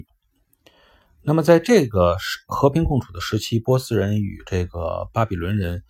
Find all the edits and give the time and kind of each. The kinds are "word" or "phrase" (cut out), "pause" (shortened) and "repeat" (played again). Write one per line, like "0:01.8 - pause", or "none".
none